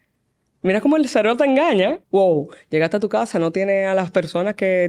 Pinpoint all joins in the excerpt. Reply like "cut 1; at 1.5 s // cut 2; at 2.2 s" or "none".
cut 1; at 2.0 s

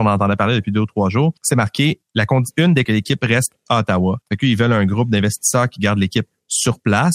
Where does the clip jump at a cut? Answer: cut 1; at 1.4 s // cut 2; at 2.8 s // cut 3; at 4.2 s

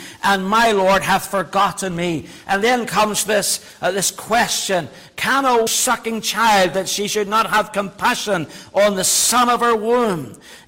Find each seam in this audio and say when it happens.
cut 1; at 5.7 s

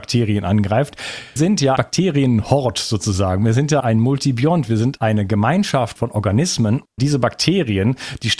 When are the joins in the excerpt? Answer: cut 1; at 1.4 s // cut 2; at 1.8 s // cut 3; at 3.8 s // cut 4; at 5.0 s // cut 5; at 6.0 s // cut 6; at 7.0 s

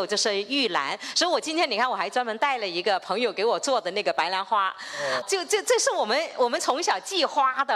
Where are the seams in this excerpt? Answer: cut 1; at 5.2 s

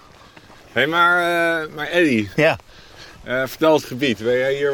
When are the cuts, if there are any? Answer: cut 1; at 3.8 s

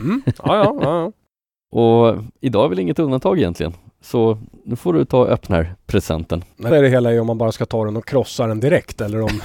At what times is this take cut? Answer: cut 1; at 5.5 s // cut 2; at 6.7 s

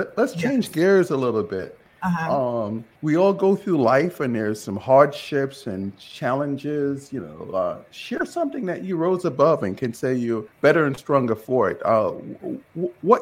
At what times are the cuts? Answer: cut 1; at 2.9 s // cut 2; at 10.5 s

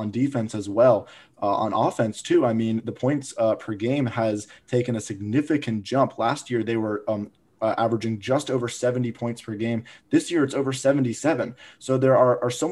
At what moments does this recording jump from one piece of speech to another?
none

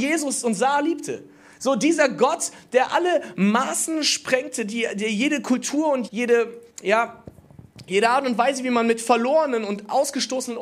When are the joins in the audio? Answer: cut 1; at 6.1 s // cut 2; at 6.7 s

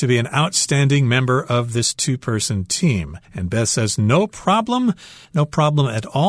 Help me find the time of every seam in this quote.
cut 1; at 3.2 s

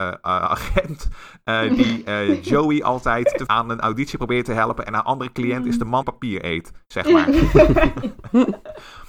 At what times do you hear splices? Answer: cut 1; at 3.5 s // cut 2; at 6.0 s

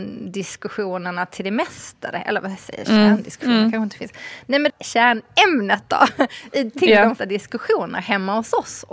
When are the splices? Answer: cut 1; at 4.7 s // cut 2; at 7.2 s

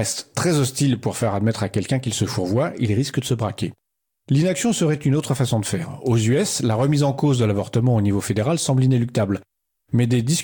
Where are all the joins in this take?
none

